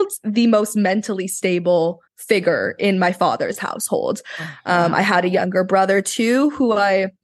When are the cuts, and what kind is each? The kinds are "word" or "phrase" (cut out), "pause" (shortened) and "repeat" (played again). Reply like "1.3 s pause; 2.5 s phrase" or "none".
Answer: 2.1 s pause